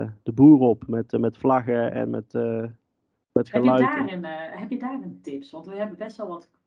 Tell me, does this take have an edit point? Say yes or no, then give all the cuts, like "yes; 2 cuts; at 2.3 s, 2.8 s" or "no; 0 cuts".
no; 0 cuts